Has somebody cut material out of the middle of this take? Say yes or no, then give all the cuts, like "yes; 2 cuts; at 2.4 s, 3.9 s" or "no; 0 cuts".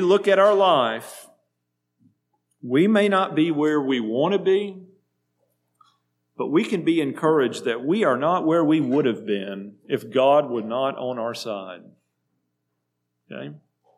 no; 0 cuts